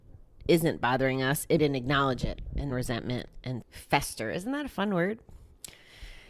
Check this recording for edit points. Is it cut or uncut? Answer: cut